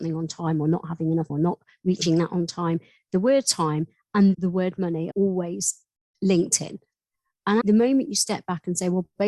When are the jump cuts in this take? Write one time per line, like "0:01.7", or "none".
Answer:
0:01.3
0:04.3
0:05.1
0:07.6